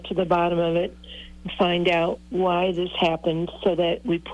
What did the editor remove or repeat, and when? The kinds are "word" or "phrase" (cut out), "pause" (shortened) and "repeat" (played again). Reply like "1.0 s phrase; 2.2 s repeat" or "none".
none